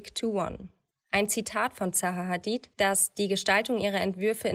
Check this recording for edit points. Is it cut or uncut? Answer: cut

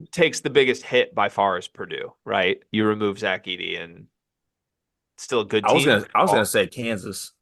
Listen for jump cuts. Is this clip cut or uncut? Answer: uncut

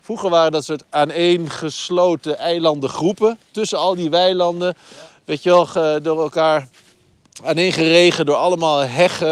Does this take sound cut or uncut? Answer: uncut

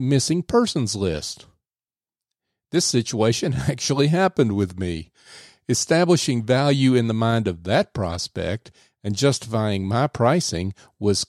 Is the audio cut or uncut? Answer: uncut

